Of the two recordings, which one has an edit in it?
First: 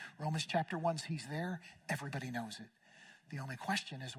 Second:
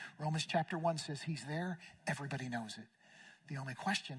first; 1 cut; at 1.0 s

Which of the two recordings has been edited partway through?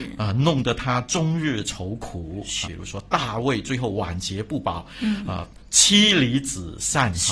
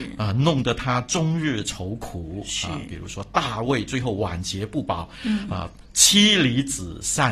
first; 1 cut; at 2.7 s

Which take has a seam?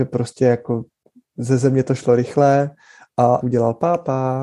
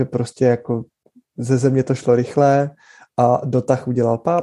first; 1 cut; at 3.4 s

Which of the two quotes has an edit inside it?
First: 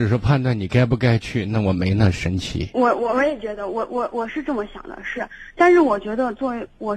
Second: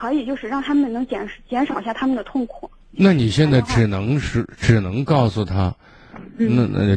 second; 1 cut; at 2.8 s

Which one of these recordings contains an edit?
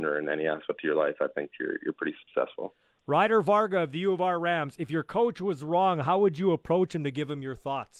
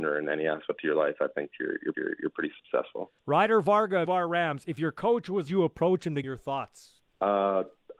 second; 6 cuts; at 1.9 s, 3.2 s, 4.1 s, 5.5 s, 6.2 s, 7.1 s

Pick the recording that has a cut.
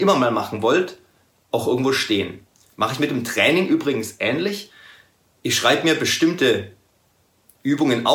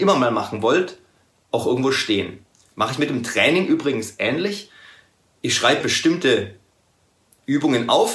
second; 1 cut; at 5.8 s

